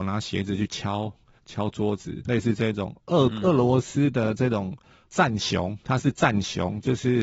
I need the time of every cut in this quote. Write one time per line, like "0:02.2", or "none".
0:02.2
0:05.8